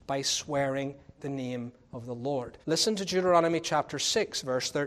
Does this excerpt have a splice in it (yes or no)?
yes